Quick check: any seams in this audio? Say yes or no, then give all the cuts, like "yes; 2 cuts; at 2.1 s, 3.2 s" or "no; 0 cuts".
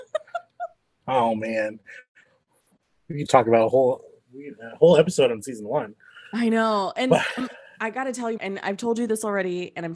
yes; 2 cuts; at 3.3 s, 8.4 s